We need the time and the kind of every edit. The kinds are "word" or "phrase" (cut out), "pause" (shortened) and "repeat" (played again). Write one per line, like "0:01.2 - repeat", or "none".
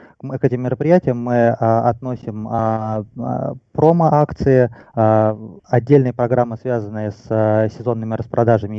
0:05.6 - pause

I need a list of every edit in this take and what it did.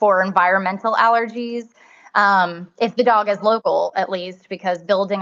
none

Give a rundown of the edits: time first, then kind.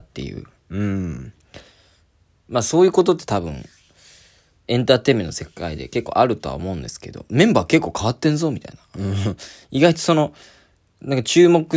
none

